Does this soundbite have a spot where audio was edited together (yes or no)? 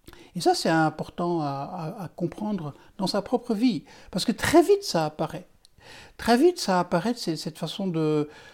no